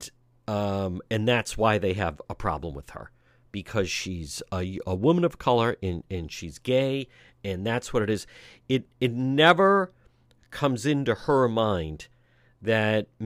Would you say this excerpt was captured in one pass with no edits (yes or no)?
yes